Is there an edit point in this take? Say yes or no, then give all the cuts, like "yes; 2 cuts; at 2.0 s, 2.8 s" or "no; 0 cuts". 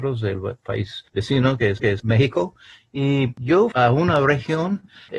yes; 3 cuts; at 1.1 s, 1.8 s, 3.7 s